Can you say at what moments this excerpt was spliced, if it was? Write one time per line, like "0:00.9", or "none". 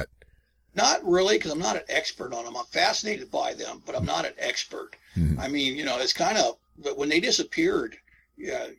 0:06.7